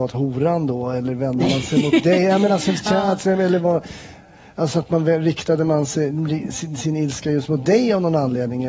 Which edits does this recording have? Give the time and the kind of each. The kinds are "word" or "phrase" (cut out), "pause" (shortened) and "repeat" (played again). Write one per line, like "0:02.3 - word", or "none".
none